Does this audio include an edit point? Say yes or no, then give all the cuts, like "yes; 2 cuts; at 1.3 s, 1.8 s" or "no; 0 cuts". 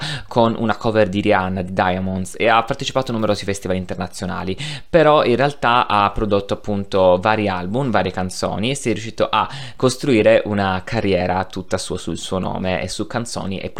no; 0 cuts